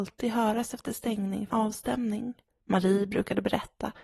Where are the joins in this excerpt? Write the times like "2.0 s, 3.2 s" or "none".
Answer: 1.5 s, 2.5 s